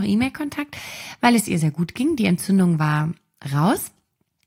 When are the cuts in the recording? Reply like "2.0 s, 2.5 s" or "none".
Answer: none